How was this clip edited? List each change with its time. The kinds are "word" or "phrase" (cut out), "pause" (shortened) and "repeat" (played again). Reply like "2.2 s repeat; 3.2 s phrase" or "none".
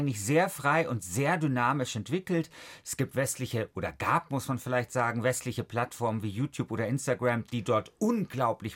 none